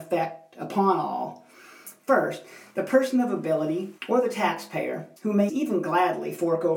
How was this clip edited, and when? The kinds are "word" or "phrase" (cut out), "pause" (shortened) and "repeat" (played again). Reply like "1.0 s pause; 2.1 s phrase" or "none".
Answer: 4.0 s pause; 5.2 s pause; 5.5 s phrase